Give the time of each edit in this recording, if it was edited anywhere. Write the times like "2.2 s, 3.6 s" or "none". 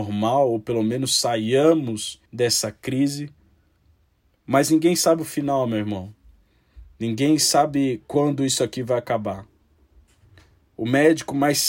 2.3 s